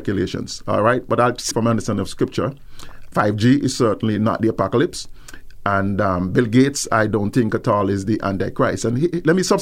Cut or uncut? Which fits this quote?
cut